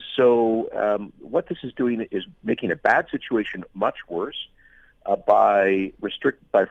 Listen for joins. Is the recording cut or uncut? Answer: cut